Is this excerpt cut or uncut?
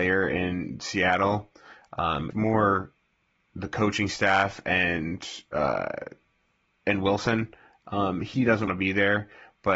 cut